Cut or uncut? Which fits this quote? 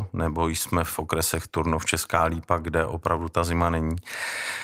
uncut